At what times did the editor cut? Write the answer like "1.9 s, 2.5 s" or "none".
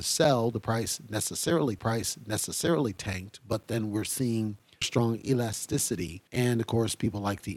1.8 s, 4.8 s, 6.3 s